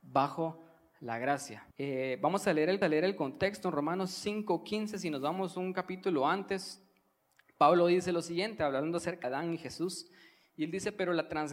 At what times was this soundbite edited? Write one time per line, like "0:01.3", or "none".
0:01.7
0:02.8
0:09.2